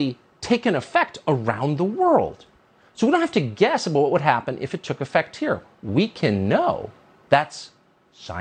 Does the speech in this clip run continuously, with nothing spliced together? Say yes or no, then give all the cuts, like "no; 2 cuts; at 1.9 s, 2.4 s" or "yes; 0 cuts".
yes; 0 cuts